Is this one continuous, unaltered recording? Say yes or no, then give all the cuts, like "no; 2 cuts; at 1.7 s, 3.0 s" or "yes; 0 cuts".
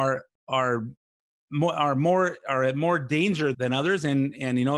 no; 1 cut; at 3.5 s